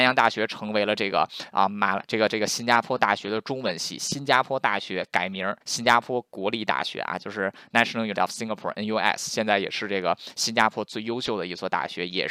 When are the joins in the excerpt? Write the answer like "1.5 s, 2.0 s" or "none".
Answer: 5.6 s, 8.1 s